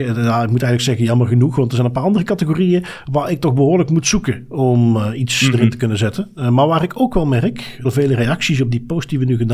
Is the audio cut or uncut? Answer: cut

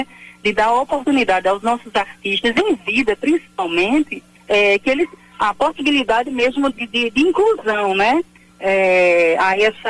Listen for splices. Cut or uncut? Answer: cut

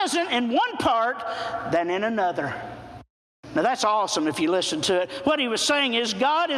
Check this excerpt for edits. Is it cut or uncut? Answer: uncut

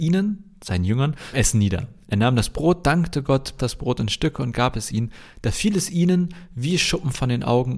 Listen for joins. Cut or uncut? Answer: cut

